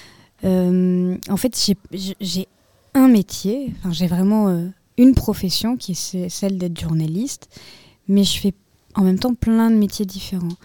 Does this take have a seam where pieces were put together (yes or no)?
no